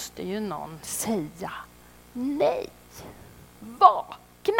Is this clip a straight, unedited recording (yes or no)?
no